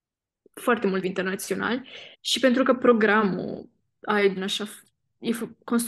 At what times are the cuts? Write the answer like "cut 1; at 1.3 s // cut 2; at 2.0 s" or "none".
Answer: cut 1; at 1.0 s // cut 2; at 2.1 s // cut 3; at 4.4 s

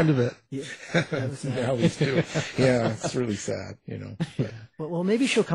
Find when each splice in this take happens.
none

